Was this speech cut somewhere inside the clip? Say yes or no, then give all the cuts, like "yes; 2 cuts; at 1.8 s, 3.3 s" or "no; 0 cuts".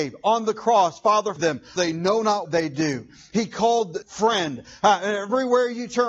yes; 4 cuts; at 1.4 s, 1.8 s, 2.4 s, 4.0 s